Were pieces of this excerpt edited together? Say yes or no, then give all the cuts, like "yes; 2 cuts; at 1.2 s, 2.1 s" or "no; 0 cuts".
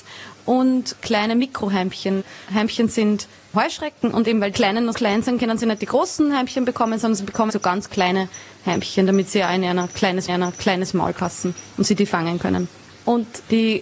yes; 4 cuts; at 4.5 s, 4.9 s, 7.5 s, 10.3 s